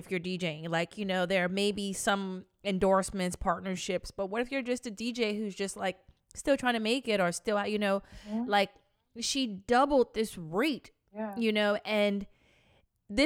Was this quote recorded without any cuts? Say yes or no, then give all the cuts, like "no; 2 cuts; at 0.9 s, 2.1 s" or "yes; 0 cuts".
yes; 0 cuts